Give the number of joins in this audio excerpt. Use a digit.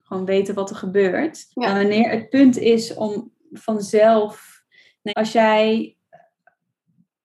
2